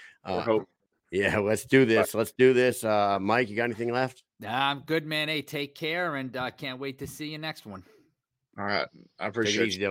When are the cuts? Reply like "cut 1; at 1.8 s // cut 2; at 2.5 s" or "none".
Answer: none